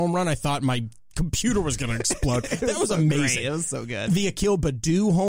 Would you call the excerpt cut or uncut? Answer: uncut